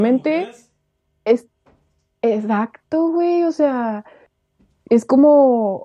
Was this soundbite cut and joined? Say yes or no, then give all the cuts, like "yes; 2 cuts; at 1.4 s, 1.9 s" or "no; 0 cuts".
no; 0 cuts